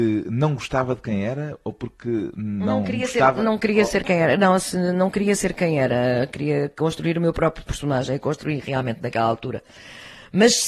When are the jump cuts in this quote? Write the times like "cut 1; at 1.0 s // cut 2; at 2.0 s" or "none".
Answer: none